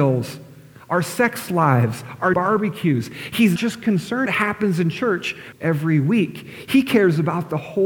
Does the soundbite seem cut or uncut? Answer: cut